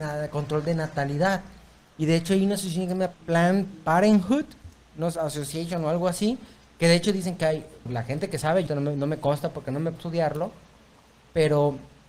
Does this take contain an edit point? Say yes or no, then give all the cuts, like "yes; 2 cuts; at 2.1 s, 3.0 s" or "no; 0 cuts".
yes; 4 cuts; at 3.1 s, 7.9 s, 8.7 s, 10.0 s